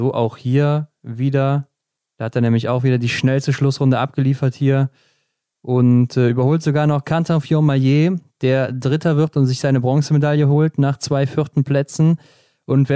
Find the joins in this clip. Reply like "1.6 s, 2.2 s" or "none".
none